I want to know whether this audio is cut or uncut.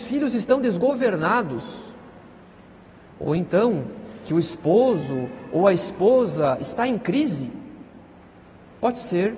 uncut